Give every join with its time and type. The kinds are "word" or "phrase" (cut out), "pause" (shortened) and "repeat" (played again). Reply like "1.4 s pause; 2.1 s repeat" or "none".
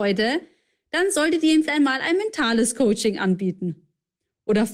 1.6 s word